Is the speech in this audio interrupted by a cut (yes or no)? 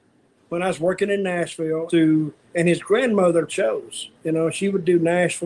yes